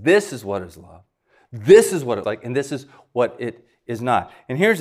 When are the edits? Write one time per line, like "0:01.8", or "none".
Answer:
0:02.2